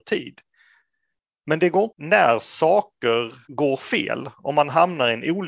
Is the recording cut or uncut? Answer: cut